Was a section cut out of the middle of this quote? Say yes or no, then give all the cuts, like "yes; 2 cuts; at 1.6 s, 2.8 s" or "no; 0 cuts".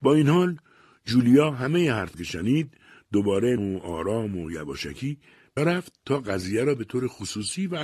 yes; 3 cuts; at 2.1 s, 3.6 s, 5.6 s